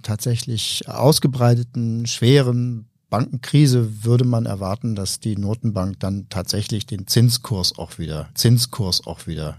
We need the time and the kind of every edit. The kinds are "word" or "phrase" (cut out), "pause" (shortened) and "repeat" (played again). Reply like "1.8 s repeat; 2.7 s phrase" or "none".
8.3 s repeat